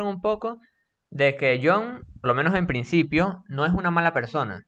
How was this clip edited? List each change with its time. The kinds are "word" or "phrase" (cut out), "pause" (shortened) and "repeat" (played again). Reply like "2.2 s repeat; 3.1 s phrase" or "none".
2.2 s word

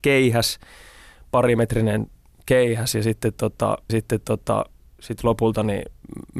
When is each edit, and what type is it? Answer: 3.9 s repeat

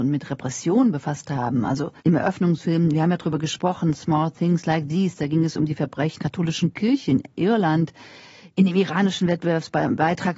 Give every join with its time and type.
2.0 s pause; 6.2 s word

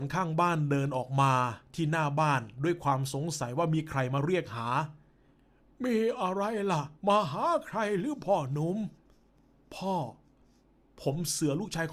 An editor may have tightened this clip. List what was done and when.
7.0 s pause

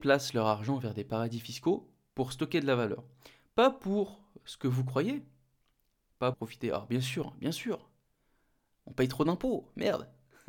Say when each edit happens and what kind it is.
6.3 s word

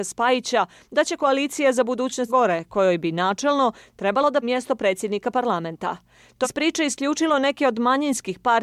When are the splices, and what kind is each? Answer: 2.3 s word; 4.4 s word; 6.4 s word

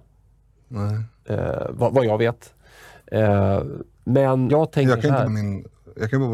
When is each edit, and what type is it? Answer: 4.5 s word; 5.3 s word

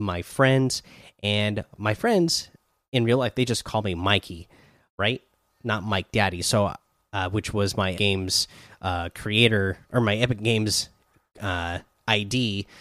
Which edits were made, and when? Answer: 7.9 s phrase; 9.8 s pause

